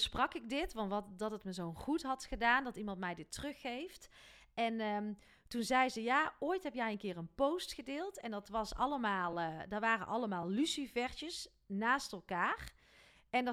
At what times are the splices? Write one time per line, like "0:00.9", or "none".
none

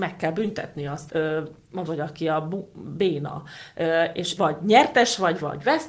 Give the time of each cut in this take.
0:01.1
0:01.9
0:04.4

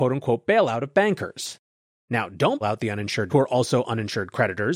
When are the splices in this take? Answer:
0:02.6
0:03.3

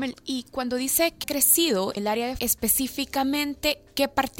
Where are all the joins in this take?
0:01.2
0:02.0
0:02.4

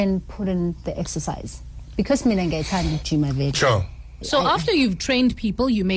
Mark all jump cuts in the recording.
none

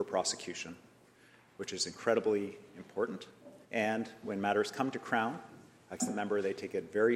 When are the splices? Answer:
0:03.6
0:06.0

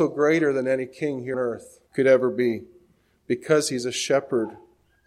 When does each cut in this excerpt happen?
0:01.3
0:01.9

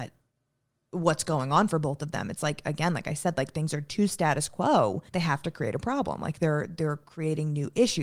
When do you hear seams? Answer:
0:05.1

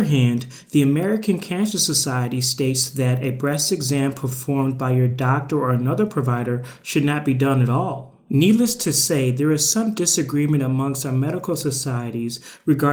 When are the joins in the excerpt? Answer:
none

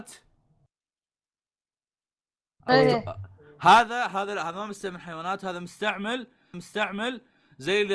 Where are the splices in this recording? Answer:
0:06.5

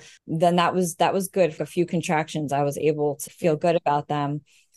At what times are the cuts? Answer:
0:01.6
0:03.3

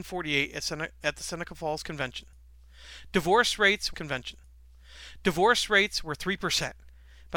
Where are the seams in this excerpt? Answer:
0:03.9

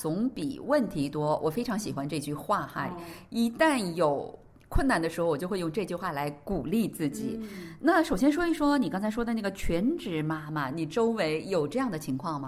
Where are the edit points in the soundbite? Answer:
none

